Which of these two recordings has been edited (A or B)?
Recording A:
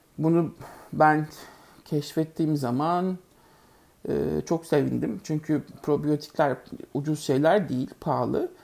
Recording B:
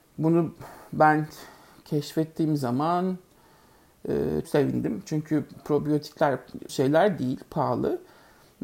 B